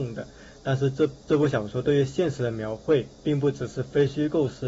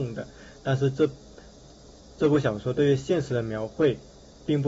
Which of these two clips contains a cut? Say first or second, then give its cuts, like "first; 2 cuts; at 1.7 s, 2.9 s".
first; 2 cuts; at 1.2 s, 3.1 s